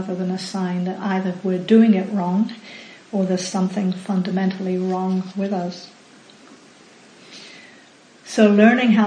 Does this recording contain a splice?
no; 0 cuts

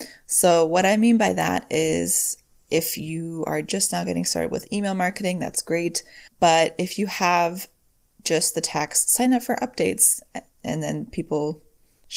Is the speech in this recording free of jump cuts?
no; 1 cut; at 6.3 s

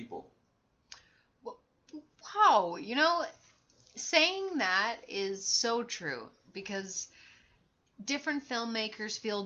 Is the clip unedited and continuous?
yes; 0 cuts

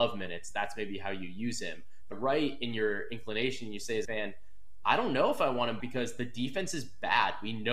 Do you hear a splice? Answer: yes; 3 cuts; at 2.1 s, 4.0 s, 5.8 s

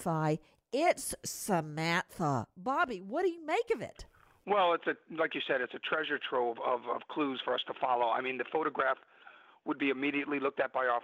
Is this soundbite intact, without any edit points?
yes; 0 cuts

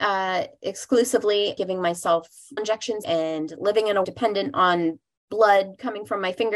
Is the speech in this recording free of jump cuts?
no; 4 cuts; at 1.6 s, 2.6 s, 3.0 s, 4.0 s

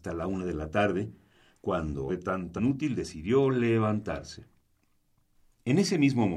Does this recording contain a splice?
yes; 2 cuts; at 2.1 s, 2.6 s

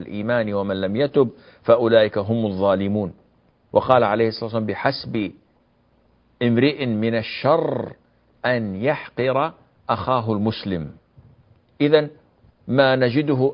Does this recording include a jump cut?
no; 0 cuts

